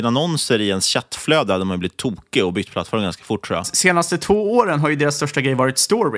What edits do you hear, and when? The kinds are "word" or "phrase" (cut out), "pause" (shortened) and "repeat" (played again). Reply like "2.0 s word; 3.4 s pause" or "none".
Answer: none